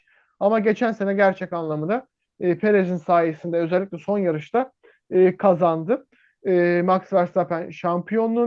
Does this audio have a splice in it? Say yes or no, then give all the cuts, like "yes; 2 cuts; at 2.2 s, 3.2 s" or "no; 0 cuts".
no; 0 cuts